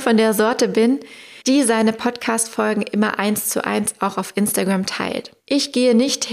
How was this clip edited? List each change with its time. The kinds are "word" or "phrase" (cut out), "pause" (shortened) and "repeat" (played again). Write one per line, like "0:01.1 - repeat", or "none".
0:01.4 - pause
0:05.4 - pause